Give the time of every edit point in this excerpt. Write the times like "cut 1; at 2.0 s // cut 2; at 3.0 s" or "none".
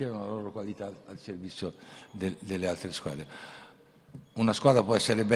none